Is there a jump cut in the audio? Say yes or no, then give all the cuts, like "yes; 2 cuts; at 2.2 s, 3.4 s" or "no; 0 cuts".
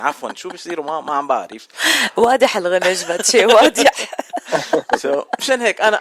no; 0 cuts